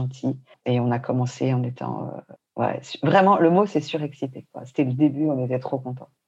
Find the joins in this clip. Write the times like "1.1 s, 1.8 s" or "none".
none